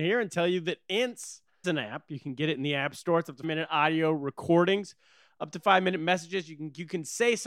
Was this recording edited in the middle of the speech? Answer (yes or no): yes